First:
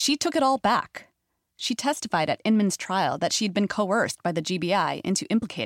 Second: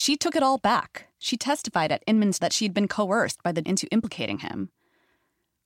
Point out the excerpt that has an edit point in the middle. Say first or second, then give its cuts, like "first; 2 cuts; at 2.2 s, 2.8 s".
second; 3 cuts; at 1.1 s, 2.4 s, 3.6 s